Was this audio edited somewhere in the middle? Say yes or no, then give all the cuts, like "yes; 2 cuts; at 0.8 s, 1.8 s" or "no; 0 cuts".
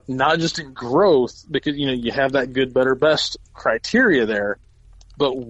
no; 0 cuts